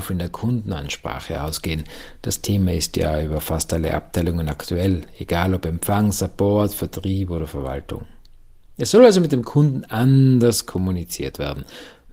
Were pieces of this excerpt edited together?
no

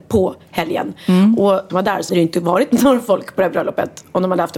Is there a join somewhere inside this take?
yes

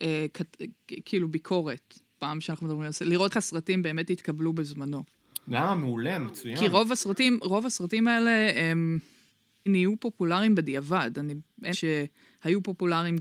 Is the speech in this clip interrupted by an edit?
yes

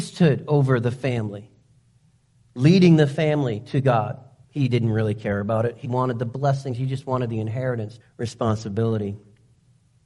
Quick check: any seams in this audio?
yes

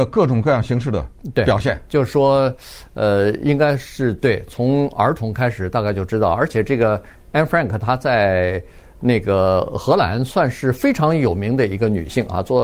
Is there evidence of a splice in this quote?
no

